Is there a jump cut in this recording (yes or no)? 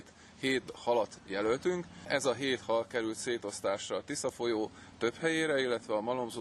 no